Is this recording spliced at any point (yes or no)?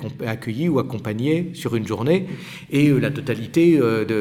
no